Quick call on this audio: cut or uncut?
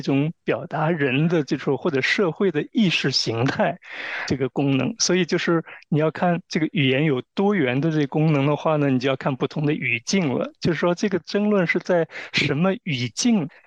cut